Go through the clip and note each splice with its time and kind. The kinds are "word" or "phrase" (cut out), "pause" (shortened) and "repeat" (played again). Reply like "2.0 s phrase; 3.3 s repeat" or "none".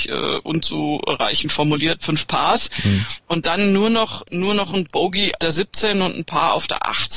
2.0 s word; 5.4 s word